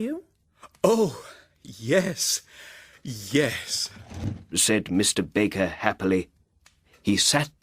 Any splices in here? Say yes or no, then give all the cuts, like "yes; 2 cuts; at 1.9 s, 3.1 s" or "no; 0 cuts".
no; 0 cuts